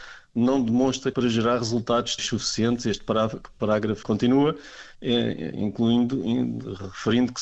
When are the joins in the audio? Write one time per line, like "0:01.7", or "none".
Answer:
0:01.1
0:02.2
0:04.0